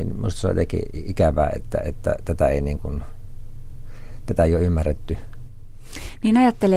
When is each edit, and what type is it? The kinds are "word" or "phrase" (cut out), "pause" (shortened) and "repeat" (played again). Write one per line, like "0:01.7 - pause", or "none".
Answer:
none